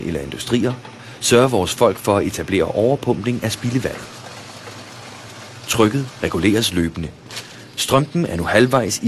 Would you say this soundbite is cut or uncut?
uncut